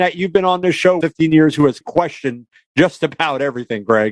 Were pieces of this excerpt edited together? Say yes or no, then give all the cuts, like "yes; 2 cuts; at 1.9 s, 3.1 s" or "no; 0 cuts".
yes; 2 cuts; at 1.0 s, 1.8 s